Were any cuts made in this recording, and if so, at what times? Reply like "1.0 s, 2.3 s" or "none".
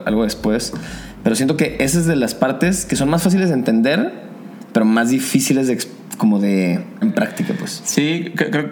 7.0 s